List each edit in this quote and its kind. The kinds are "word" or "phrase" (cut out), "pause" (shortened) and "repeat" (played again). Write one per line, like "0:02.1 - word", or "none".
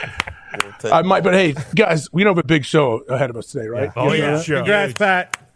none